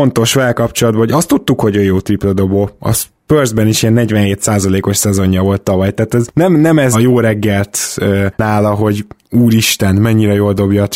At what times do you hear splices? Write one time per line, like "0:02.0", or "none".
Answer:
0:06.9